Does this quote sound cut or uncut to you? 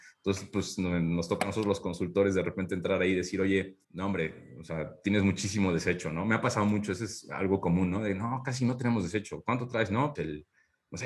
cut